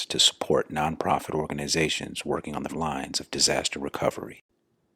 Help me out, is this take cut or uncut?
cut